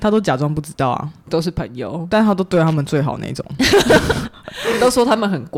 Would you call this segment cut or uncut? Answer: cut